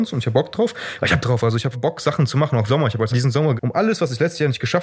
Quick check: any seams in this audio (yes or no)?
yes